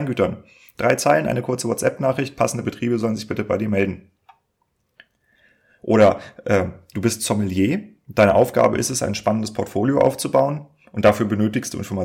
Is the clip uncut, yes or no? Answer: yes